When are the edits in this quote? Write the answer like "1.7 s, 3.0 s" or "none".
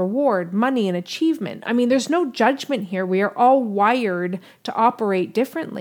none